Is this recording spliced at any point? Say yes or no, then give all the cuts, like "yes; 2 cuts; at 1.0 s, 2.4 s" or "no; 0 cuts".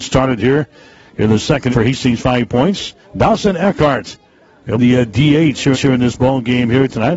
yes; 4 cuts; at 1.7 s, 3.0 s, 4.8 s, 5.7 s